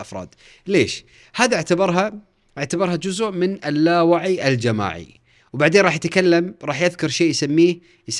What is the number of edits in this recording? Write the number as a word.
zero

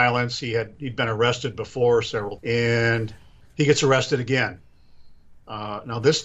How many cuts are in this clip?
one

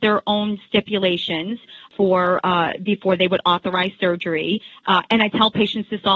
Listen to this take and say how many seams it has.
zero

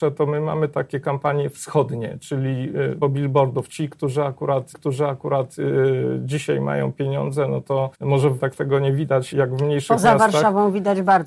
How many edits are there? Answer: five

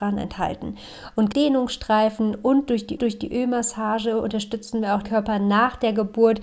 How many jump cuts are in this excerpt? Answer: three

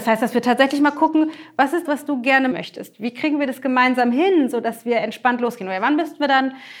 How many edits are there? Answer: two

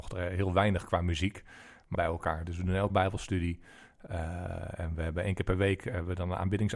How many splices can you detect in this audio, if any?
two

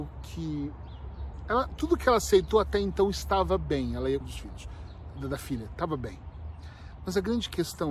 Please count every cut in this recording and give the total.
one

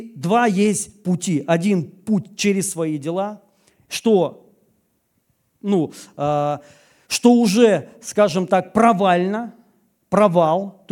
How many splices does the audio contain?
zero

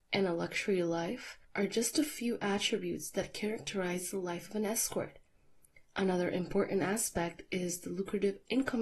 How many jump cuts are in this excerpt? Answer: one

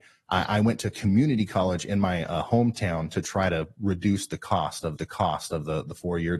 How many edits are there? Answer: one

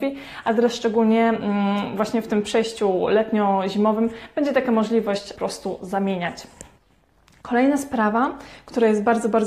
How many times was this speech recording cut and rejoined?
one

